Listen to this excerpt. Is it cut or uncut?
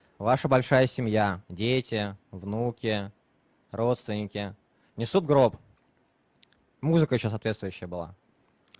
cut